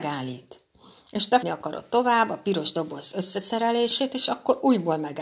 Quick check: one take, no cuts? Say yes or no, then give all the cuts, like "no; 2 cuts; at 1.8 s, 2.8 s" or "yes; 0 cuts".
no; 1 cut; at 1.4 s